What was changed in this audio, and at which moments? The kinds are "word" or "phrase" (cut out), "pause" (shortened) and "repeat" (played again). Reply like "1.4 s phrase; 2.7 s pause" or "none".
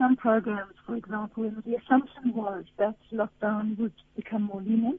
1.6 s phrase